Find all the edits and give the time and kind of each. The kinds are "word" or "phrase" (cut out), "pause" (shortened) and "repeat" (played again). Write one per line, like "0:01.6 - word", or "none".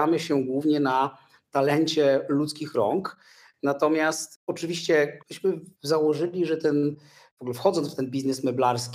0:05.2 - pause